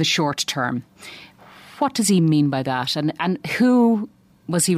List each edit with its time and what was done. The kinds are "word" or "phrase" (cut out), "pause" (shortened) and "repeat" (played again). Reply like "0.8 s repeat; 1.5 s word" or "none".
none